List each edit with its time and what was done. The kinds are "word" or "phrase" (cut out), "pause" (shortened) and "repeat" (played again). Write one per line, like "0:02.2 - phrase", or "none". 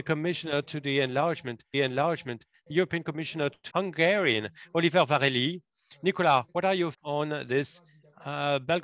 0:01.7 - repeat
0:03.7 - phrase
0:06.5 - pause
0:06.9 - word

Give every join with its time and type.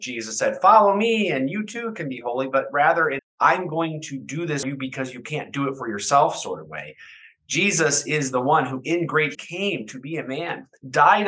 0:03.2 - word
0:04.6 - word
0:09.3 - word

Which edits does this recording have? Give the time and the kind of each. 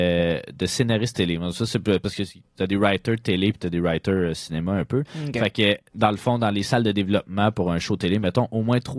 0:05.9 - pause

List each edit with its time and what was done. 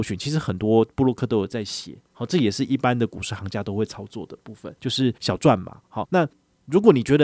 0:04.8 - pause
0:05.2 - pause
0:06.0 - word

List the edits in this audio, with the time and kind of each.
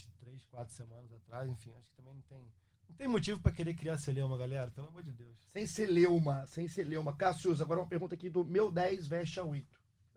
0:02.7 - pause

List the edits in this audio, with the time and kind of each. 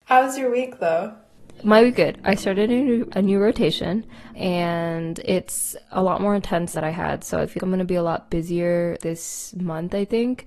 0:01.9 - word
0:03.1 - word
0:04.3 - word
0:06.7 - phrase
0:07.6 - word
0:09.0 - word

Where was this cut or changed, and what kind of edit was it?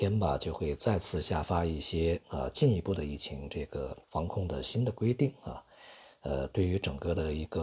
0:04.0 - pause

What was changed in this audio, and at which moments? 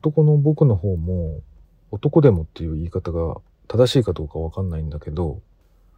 0:01.6 - pause
0:03.6 - pause

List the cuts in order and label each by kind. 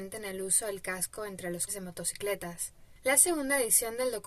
0:01.7 - word

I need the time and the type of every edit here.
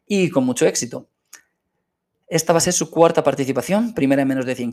none

